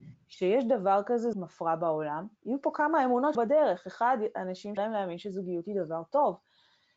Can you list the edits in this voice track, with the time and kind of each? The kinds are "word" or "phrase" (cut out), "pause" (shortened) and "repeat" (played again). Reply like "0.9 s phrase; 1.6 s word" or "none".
1.3 s word; 2.4 s pause; 3.3 s word; 4.8 s word